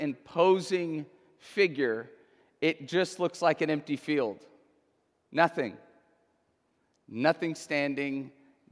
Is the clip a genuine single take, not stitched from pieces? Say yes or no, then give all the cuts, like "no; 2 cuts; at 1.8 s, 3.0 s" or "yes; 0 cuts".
yes; 0 cuts